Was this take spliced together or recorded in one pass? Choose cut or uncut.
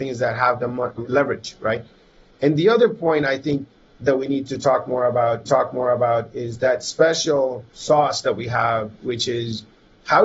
cut